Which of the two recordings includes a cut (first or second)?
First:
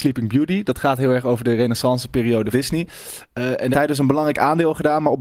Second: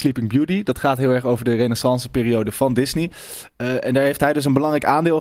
first